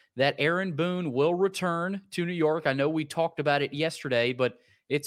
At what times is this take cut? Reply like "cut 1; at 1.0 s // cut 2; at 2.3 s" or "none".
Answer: none